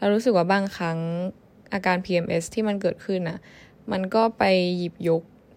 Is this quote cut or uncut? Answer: uncut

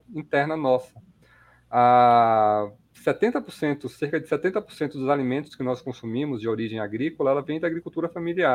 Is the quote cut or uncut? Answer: uncut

